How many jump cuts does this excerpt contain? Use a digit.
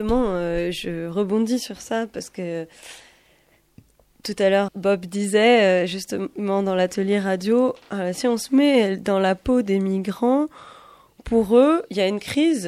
1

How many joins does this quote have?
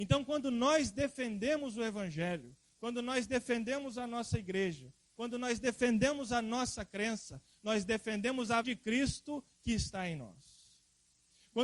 1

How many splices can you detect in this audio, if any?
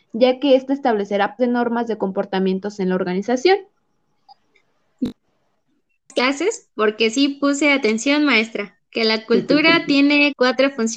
1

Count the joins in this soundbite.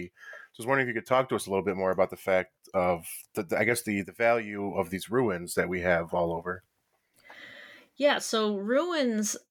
0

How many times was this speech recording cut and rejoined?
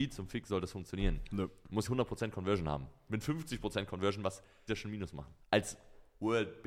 4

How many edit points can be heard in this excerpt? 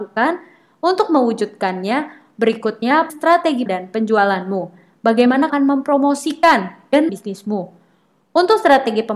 4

